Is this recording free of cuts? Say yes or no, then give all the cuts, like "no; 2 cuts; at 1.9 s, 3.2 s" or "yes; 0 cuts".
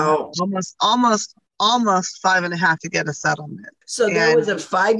no; 3 cuts; at 1.5 s, 2.8 s, 3.8 s